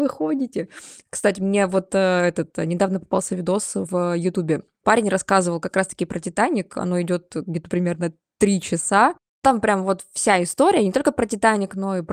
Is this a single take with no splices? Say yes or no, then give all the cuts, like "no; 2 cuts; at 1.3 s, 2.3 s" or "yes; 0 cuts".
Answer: yes; 0 cuts